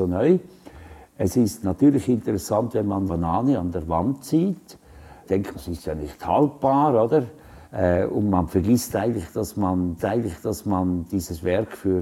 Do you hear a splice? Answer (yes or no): yes